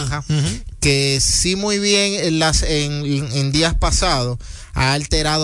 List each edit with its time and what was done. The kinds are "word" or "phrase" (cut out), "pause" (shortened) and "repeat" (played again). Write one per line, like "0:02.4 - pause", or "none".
none